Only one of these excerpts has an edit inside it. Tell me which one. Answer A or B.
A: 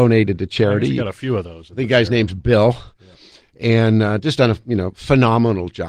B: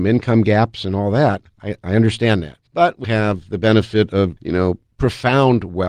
B